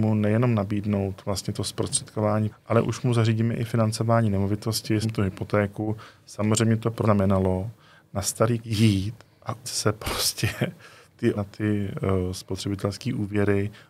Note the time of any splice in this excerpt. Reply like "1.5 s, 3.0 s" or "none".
2.5 s, 5.0 s, 7.0 s, 8.6 s, 9.6 s, 11.3 s